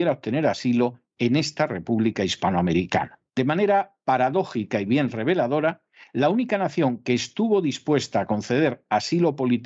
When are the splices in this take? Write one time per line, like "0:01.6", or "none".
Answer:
0:03.3